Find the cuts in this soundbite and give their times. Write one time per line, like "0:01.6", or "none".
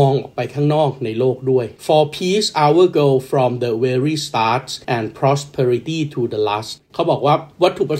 0:01.8
0:04.8
0:06.8